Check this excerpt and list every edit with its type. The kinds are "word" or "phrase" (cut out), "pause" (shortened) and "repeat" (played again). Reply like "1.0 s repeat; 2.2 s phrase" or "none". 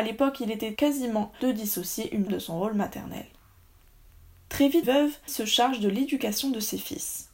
1.3 s word; 2.3 s word; 4.8 s word; 5.3 s word